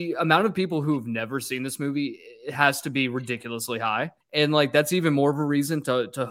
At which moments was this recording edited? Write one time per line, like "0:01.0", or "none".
0:04.2